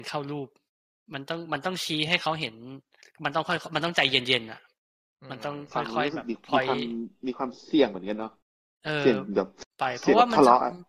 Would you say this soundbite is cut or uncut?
cut